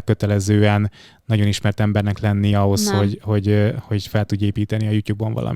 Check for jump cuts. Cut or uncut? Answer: uncut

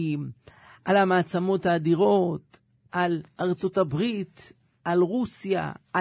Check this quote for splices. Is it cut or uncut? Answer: uncut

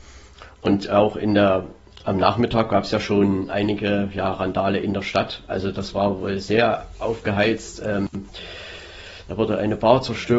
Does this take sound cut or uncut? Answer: uncut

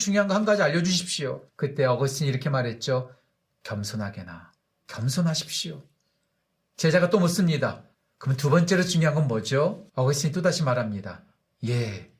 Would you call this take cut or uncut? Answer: cut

